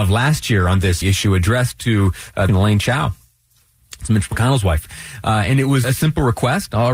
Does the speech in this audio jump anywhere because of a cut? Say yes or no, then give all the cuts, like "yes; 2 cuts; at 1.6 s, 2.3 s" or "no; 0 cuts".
yes; 3 cuts; at 1.0 s, 2.5 s, 5.8 s